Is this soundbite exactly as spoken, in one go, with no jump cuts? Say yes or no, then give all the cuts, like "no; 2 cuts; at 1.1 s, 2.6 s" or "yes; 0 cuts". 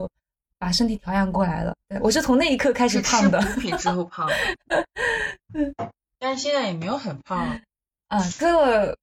no; 1 cut; at 1.8 s